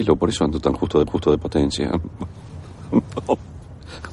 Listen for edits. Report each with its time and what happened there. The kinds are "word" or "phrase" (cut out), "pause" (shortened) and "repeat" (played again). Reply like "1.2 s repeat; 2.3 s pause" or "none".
1.1 s repeat